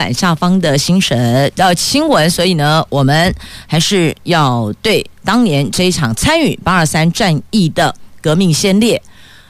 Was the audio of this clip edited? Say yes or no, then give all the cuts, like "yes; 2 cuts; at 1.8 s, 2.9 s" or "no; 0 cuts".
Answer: yes; 1 cut; at 5.2 s